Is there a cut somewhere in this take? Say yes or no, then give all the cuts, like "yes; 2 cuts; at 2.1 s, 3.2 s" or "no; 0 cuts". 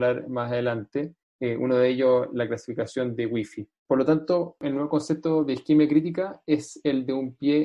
yes; 1 cut; at 1.2 s